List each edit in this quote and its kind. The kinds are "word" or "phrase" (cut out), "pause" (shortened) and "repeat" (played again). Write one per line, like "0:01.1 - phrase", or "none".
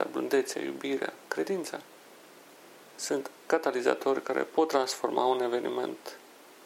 0:03.5 - word